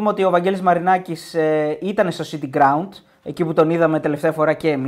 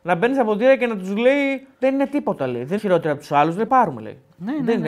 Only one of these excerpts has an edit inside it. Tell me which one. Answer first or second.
second